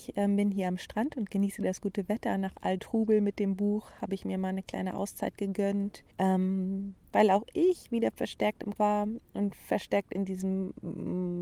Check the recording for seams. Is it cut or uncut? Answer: cut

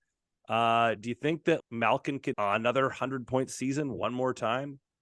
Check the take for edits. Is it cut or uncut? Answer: cut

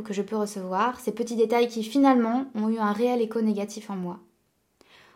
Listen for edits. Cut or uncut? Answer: uncut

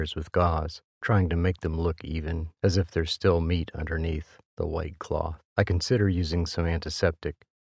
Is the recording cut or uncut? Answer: cut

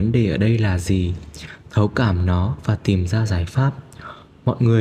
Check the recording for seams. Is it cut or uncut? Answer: uncut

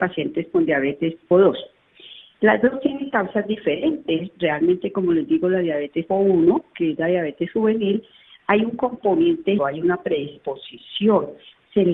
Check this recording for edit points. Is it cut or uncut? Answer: cut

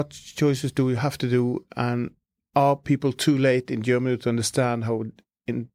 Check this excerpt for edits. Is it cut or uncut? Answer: uncut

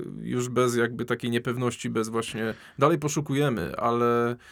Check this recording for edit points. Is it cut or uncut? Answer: uncut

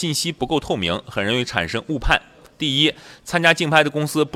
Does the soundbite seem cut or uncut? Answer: uncut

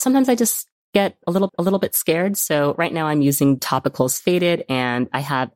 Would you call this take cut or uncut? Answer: cut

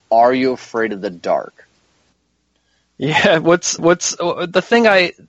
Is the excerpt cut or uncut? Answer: cut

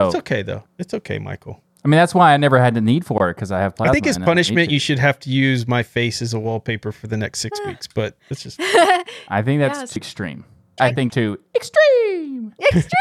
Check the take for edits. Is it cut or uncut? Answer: cut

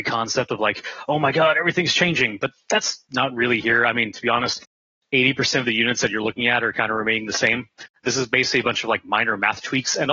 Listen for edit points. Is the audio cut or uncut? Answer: uncut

